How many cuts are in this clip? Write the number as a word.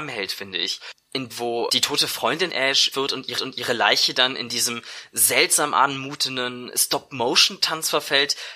five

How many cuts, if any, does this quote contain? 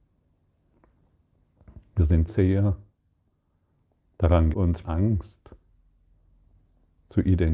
three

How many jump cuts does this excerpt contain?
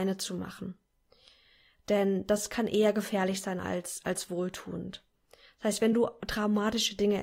zero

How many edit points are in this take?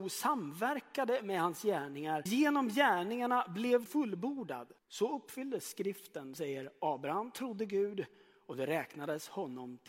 four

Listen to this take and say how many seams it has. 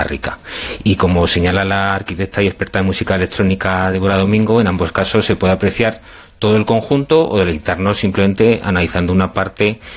zero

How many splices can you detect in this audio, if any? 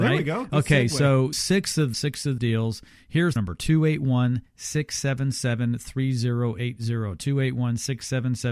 four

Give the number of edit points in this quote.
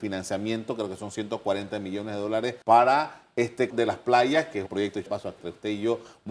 five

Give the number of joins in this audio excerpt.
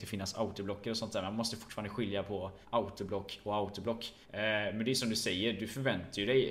two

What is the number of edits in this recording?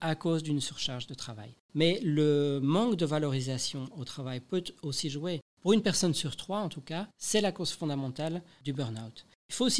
one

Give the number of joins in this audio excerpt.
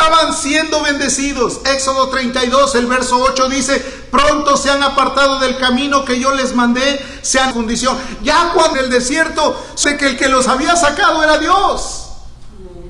three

